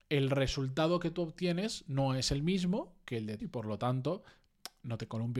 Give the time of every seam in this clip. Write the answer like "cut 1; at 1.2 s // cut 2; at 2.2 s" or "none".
cut 1; at 3.4 s